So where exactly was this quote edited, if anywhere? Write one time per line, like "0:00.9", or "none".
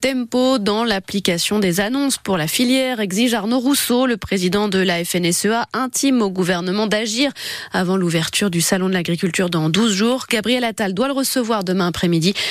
none